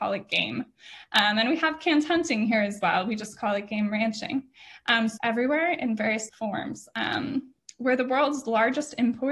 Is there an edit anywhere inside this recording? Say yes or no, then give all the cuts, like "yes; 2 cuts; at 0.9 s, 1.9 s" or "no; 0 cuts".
yes; 2 cuts; at 5.2 s, 6.3 s